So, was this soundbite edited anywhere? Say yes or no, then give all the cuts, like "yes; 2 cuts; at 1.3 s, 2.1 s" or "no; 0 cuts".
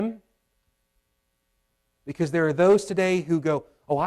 no; 0 cuts